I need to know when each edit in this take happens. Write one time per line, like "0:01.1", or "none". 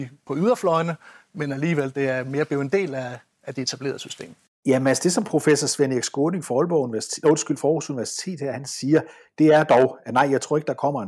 none